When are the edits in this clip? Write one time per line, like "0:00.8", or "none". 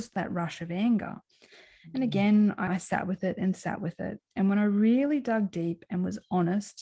0:02.7